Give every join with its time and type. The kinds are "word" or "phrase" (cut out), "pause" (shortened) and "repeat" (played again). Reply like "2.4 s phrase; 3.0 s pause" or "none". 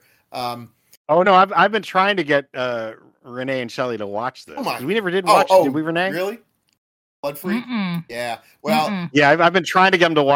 1.2 s word